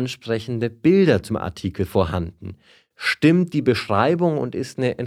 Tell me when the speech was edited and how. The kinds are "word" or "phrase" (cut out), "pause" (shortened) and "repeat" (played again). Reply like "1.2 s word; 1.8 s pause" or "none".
1.3 s word